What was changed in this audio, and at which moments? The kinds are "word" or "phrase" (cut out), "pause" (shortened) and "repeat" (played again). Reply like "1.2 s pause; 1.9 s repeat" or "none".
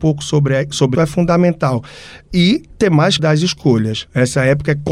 0.9 s word; 3.2 s word